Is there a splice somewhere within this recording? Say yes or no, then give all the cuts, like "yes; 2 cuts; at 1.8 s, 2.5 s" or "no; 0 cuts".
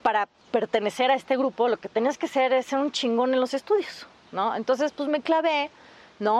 no; 0 cuts